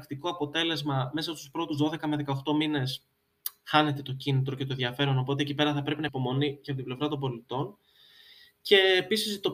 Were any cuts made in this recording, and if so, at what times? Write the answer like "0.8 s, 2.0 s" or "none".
6.1 s

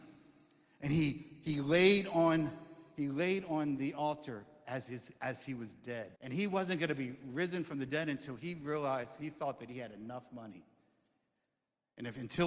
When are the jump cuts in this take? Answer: 6.2 s

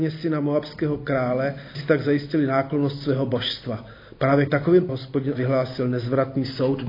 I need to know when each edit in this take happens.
1.7 s, 4.5 s, 4.9 s, 5.3 s

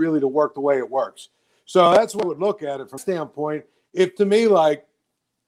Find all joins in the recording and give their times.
2.2 s, 3.0 s, 4.2 s

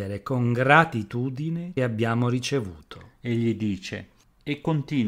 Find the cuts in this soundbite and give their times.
1.8 s

